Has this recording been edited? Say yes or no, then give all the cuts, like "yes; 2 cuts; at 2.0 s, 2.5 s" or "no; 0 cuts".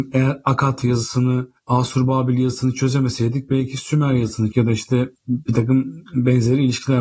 yes; 2 cuts; at 4.5 s, 5.2 s